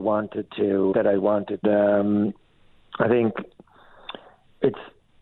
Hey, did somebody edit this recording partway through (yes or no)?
yes